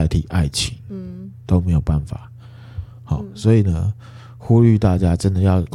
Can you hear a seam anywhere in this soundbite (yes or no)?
no